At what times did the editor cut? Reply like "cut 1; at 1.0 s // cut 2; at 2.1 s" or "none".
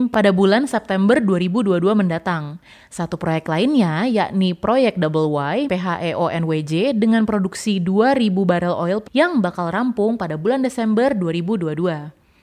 cut 1; at 5.7 s // cut 2; at 9.1 s